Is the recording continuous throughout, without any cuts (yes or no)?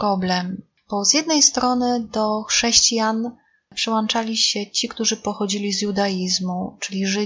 yes